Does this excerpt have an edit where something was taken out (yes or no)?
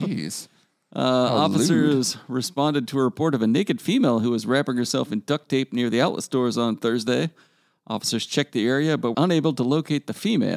yes